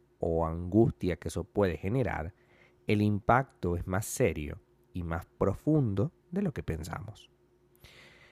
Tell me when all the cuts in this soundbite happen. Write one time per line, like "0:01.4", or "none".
none